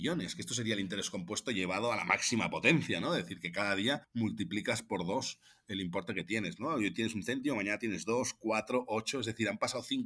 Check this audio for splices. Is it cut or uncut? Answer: cut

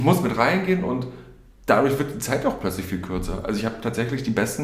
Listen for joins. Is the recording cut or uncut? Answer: uncut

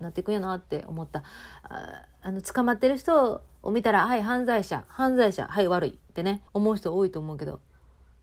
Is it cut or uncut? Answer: cut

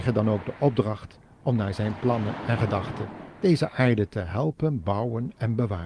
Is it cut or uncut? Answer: uncut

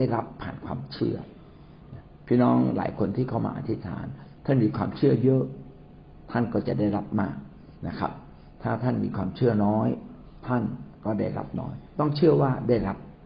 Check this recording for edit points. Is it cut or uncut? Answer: cut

